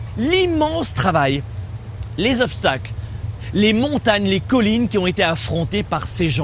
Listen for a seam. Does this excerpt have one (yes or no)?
no